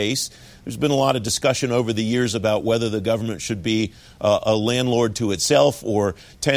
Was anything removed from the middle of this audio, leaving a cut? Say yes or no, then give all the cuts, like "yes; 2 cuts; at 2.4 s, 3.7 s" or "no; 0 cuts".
no; 0 cuts